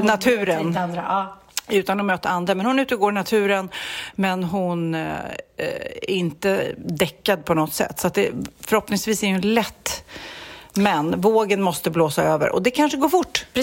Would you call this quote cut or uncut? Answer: uncut